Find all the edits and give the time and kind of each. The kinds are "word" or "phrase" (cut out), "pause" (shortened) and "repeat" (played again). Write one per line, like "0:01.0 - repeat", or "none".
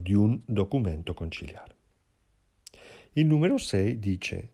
none